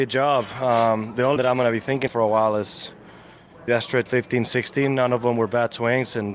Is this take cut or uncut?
cut